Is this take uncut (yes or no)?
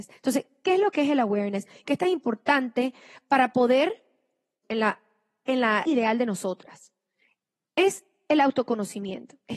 no